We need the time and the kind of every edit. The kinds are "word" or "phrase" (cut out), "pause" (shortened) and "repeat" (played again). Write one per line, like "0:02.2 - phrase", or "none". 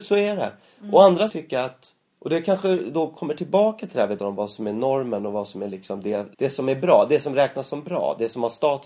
0:01.3 - phrase
0:02.1 - pause
0:04.2 - word
0:06.3 - pause